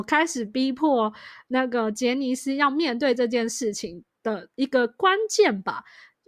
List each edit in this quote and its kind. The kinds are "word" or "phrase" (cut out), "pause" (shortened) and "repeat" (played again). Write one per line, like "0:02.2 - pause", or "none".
0:04.5 - pause